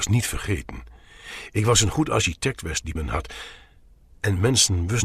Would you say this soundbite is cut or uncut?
cut